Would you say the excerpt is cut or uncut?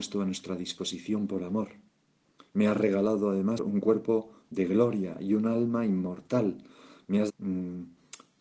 cut